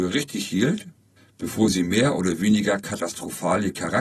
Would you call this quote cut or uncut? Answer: cut